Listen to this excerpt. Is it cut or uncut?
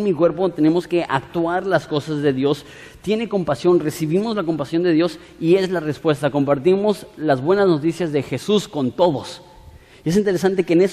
uncut